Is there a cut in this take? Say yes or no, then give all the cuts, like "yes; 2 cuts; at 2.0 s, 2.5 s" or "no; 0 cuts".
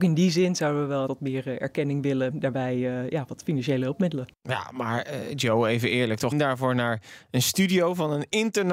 yes; 3 cuts; at 1.1 s, 2.3 s, 6.3 s